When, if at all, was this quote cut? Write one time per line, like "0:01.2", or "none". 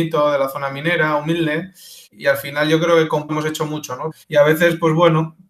0:02.0
0:03.3
0:04.2